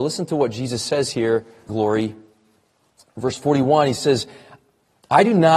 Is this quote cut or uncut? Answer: cut